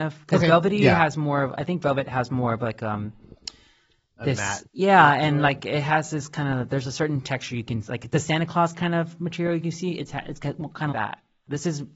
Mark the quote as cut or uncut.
cut